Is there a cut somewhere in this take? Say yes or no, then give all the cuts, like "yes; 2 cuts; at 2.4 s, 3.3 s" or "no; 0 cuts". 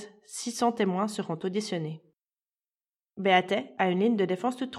no; 0 cuts